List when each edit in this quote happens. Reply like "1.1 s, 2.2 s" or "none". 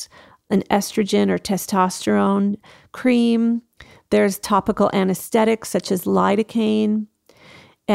none

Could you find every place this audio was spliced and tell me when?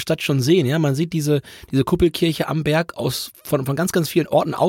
none

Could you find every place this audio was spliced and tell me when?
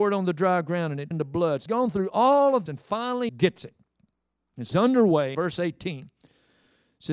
1.1 s, 1.7 s, 2.7 s, 3.3 s, 4.7 s, 5.3 s

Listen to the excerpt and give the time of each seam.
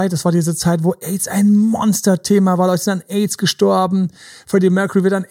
none

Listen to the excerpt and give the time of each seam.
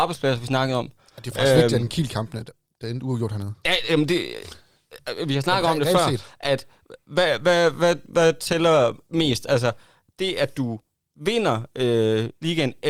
none

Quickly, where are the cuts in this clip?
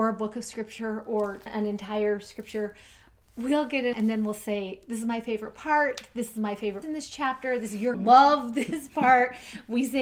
1.5 s, 3.9 s, 6.8 s, 7.9 s

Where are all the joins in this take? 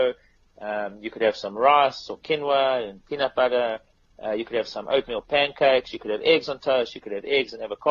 none

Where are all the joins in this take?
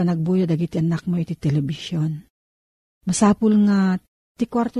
none

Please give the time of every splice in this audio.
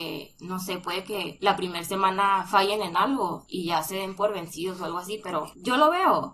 none

